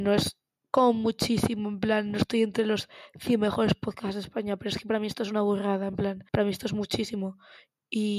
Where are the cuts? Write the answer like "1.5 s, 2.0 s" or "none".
6.3 s